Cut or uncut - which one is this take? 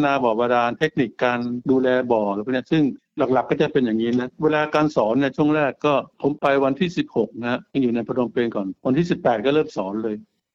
cut